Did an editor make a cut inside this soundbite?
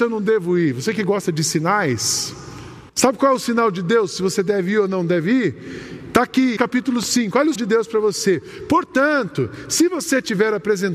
yes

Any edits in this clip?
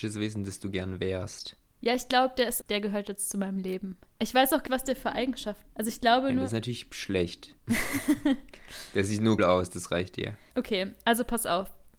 yes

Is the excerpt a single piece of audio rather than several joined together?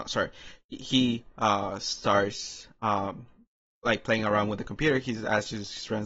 yes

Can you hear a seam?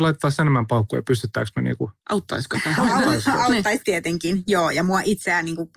yes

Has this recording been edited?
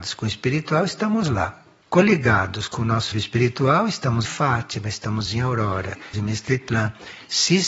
yes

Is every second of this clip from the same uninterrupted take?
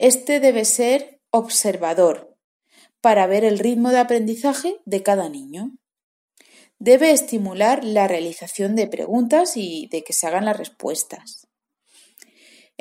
no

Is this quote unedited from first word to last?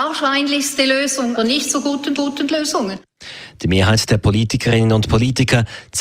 no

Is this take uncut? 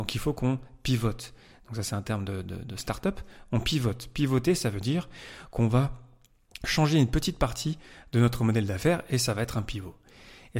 yes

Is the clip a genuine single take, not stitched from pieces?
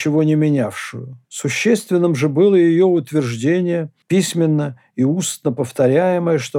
no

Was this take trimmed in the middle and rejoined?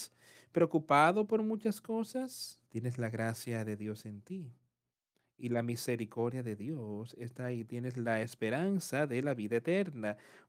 yes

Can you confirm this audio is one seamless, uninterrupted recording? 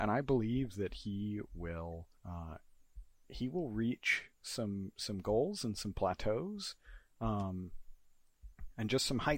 no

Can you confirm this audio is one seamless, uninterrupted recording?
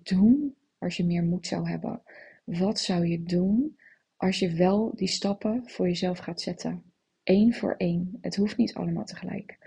yes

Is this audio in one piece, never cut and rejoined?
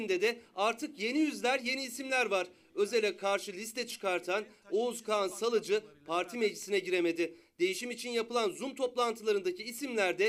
yes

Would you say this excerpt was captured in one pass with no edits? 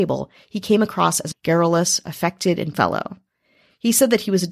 no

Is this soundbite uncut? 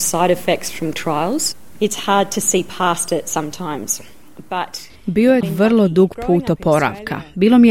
no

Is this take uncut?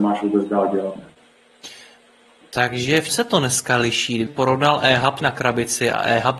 no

